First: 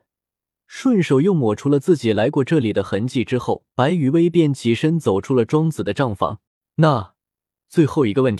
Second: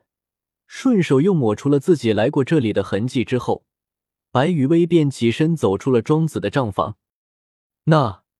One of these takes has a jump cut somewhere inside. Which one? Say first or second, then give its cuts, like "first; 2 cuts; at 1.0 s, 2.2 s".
first; 2 cuts; at 3.7 s, 6.5 s